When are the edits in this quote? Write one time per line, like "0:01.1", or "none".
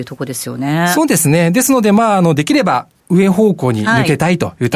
0:03.0